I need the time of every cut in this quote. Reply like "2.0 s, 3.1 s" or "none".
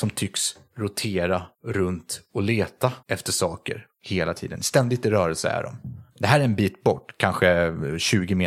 1.5 s, 3.0 s, 3.9 s, 6.1 s

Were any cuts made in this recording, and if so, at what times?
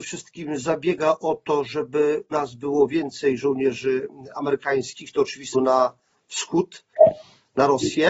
2.3 s, 5.5 s

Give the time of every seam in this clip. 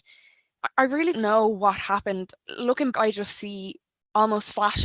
1.1 s, 2.9 s

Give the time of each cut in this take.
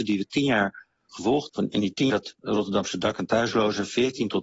1.5 s, 2.1 s

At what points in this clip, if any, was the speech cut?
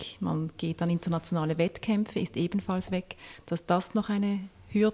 none

